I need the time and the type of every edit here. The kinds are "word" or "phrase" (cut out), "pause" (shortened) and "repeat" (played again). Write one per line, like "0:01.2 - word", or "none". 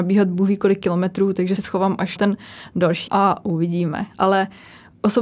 0:01.6 - phrase
0:02.2 - word
0:03.1 - word